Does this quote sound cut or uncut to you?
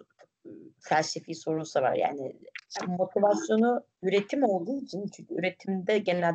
cut